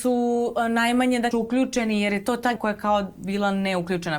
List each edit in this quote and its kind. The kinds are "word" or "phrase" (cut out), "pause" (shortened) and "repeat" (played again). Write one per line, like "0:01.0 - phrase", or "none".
0:01.3 - word
0:02.6 - word